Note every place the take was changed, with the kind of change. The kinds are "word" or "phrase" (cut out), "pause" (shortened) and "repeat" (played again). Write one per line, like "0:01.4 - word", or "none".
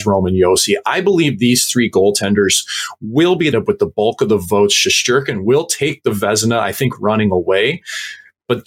0:03.5 - phrase